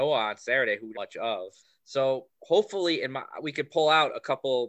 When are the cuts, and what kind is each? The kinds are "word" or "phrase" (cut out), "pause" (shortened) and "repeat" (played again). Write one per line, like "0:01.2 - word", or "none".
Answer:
0:00.9 - phrase
0:01.6 - pause